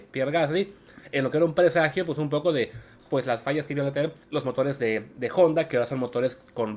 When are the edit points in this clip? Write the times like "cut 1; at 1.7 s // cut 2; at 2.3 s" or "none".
cut 1; at 4.2 s